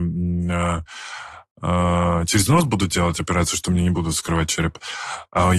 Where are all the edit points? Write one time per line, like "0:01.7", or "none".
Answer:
none